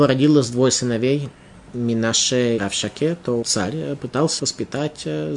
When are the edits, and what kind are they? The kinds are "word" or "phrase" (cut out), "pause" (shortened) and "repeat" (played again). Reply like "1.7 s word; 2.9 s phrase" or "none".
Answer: 2.6 s word; 3.4 s word; 4.4 s word